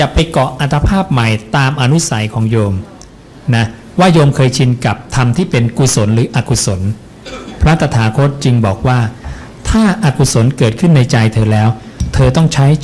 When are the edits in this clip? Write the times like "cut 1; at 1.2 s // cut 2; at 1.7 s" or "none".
none